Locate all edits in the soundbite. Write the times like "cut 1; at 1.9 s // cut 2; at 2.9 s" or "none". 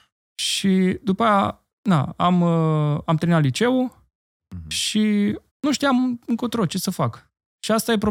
cut 1; at 1.7 s // cut 2; at 5.5 s